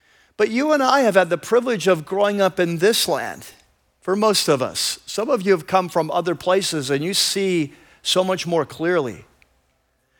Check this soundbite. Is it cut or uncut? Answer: uncut